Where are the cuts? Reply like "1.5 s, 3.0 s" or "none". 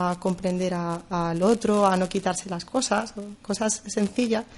none